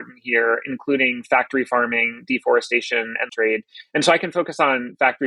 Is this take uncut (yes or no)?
no